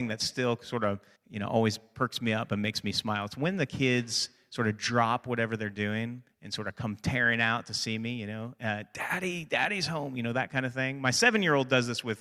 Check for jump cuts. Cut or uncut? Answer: cut